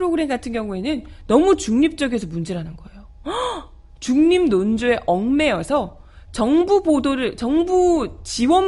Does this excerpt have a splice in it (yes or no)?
no